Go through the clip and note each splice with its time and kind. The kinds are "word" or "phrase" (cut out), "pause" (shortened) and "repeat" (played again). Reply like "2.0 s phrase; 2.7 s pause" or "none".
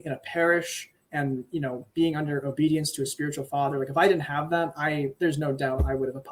none